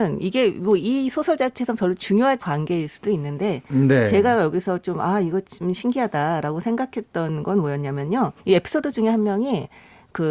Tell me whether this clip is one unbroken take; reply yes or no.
no